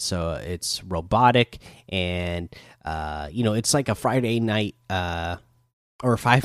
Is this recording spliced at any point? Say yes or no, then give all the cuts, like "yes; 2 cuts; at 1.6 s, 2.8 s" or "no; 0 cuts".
no; 0 cuts